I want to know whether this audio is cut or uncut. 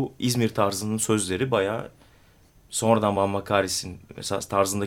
uncut